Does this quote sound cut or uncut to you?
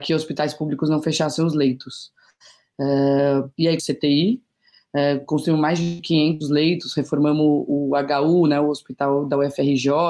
cut